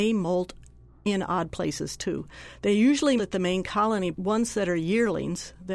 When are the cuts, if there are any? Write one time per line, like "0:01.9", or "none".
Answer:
0:03.2
0:04.1